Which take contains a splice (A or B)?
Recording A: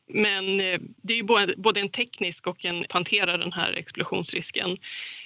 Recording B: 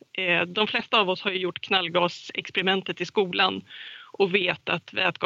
A